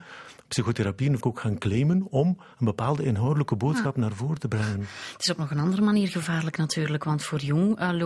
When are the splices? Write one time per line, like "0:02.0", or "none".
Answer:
0:01.2

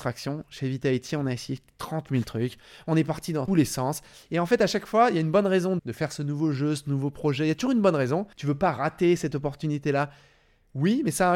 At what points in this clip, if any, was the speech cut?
0:03.5
0:05.8
0:08.3

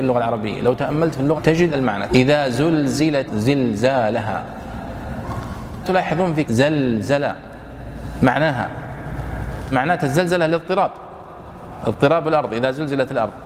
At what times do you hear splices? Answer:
0:01.3
0:01.7
0:02.1
0:03.3
0:05.8
0:06.4
0:09.7

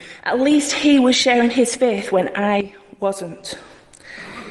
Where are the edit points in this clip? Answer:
none

